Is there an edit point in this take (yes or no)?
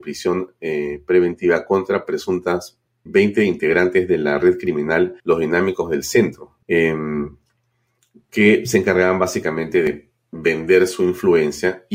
yes